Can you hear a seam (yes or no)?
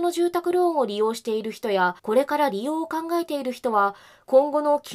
yes